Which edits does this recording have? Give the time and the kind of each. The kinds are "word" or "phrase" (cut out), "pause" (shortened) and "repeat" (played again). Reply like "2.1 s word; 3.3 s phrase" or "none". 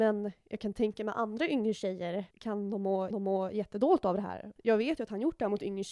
2.3 s pause; 3.1 s repeat